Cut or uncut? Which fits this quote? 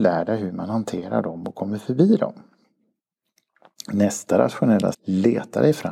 cut